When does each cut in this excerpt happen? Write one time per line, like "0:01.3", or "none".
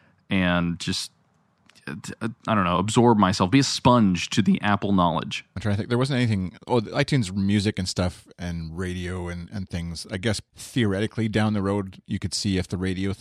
0:02.4
0:10.5